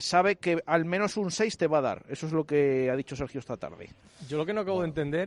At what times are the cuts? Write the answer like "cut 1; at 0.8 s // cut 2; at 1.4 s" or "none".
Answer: none